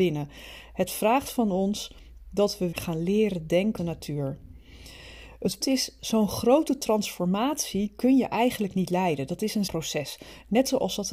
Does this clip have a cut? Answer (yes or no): yes